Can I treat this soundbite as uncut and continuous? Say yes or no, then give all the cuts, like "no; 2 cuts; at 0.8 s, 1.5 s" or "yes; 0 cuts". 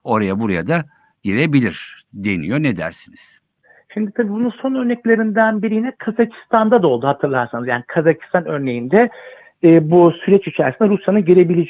yes; 0 cuts